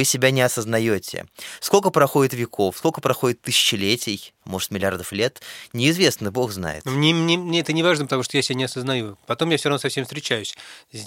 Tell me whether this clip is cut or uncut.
uncut